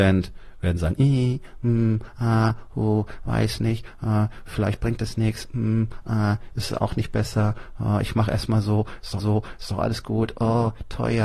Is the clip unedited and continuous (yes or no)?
no